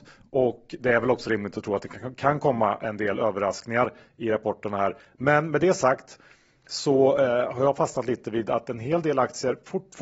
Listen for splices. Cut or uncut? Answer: uncut